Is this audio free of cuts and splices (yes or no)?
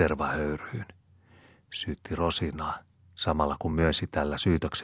yes